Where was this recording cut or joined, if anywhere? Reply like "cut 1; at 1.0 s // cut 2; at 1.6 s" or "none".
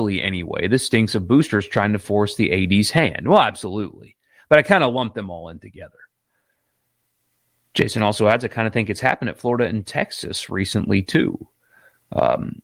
none

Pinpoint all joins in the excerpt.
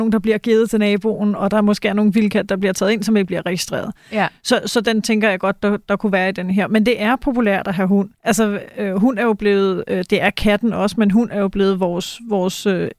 cut 1; at 4.8 s // cut 2; at 8.2 s

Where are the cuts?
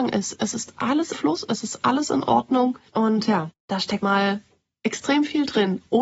cut 1; at 1.1 s // cut 2; at 2.9 s // cut 3; at 3.6 s // cut 4; at 4.0 s

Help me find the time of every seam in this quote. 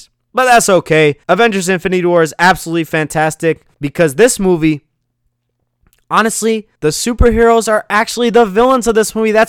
cut 1; at 1.2 s // cut 2; at 3.7 s // cut 3; at 6.8 s

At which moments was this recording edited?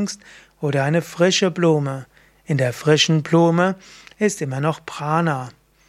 none

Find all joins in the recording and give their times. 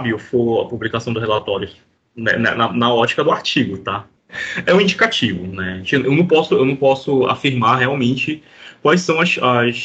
none

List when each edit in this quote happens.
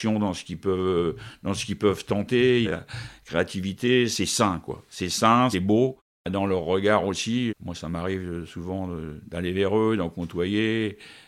cut 1; at 2.6 s // cut 2; at 5.5 s // cut 3; at 7.5 s

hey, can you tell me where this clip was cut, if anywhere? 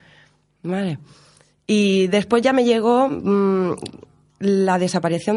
none

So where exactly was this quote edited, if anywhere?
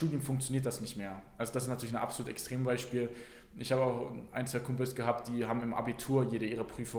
none

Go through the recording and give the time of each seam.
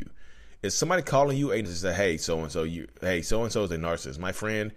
cut 1; at 1.6 s

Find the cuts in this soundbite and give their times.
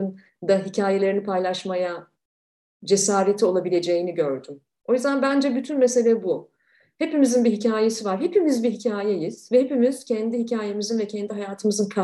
none

